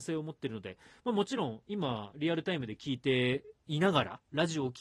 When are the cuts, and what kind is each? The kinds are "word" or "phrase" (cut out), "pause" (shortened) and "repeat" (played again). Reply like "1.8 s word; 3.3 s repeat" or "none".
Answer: 3.6 s pause